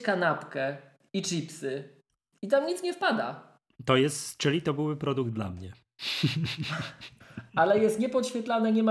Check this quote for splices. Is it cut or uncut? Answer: uncut